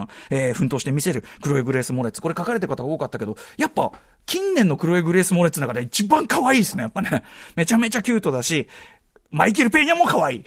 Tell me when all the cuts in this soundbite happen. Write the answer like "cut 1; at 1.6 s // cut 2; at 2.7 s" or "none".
none